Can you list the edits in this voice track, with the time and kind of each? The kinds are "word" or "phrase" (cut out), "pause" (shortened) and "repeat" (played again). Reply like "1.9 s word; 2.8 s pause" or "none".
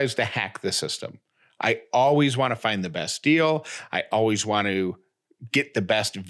none